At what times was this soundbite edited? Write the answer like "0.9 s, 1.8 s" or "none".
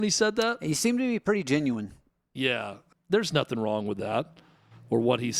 2.9 s